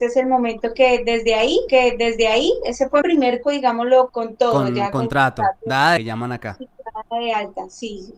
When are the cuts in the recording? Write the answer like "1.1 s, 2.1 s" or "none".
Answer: 1.7 s, 3.0 s, 3.4 s, 4.1 s, 6.0 s